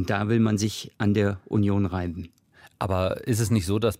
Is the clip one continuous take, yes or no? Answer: yes